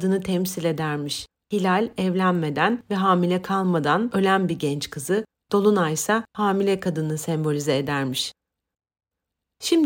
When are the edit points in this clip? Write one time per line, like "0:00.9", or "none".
0:06.3